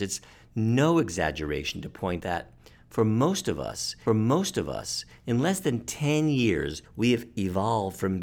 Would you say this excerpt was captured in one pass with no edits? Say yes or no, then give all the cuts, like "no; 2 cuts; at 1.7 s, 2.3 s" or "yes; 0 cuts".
no; 3 cuts; at 2.2 s, 4.1 s, 6.9 s